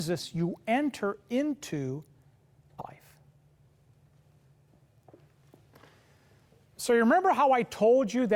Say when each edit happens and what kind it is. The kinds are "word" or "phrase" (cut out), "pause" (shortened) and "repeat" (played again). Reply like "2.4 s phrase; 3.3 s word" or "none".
2.8 s word